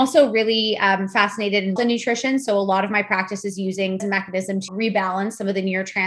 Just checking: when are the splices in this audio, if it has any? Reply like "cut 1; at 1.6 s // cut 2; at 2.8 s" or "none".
cut 1; at 1.8 s // cut 2; at 4.0 s // cut 3; at 4.7 s